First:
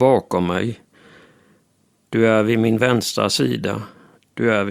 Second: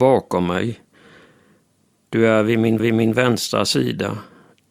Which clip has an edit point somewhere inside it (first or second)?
second